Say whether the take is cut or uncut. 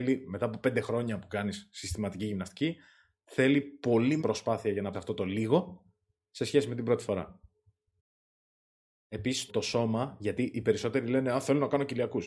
cut